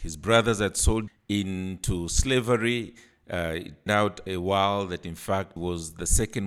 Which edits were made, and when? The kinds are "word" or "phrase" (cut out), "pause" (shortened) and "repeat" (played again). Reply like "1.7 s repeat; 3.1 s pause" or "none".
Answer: 1.1 s word; 3.9 s word; 4.3 s word; 5.6 s word